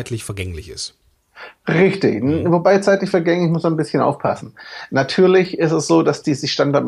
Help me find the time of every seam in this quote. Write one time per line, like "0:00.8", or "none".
none